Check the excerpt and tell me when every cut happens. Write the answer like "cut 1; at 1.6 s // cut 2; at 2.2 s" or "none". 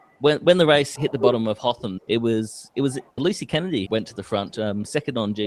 cut 1; at 1.0 s // cut 2; at 2.0 s // cut 3; at 3.2 s // cut 4; at 3.9 s